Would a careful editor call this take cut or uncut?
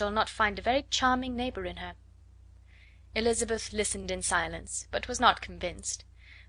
uncut